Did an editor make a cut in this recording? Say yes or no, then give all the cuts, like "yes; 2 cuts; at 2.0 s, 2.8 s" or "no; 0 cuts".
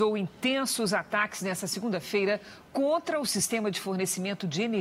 no; 0 cuts